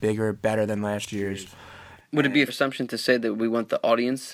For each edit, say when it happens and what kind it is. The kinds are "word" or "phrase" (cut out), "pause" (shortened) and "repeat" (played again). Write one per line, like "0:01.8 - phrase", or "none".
0:02.5 - word